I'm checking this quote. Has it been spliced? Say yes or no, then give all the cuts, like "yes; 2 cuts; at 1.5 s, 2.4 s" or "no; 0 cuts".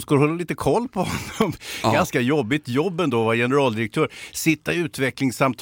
no; 0 cuts